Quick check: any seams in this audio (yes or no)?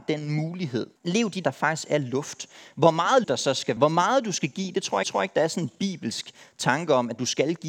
yes